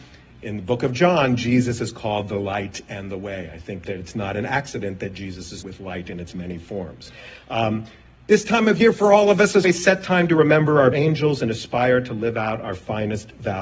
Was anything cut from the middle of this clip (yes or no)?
yes